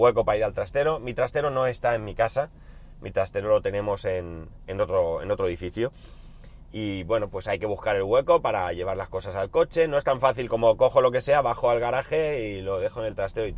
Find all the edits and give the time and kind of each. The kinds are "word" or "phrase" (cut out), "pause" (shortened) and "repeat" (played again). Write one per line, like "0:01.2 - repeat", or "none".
none